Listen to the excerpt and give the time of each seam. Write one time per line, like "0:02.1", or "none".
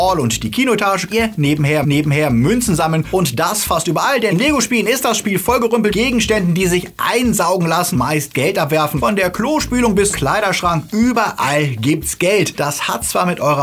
0:01.1
0:01.8
0:04.3
0:05.9
0:07.9
0:10.1